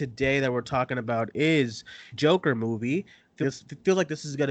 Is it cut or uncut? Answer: cut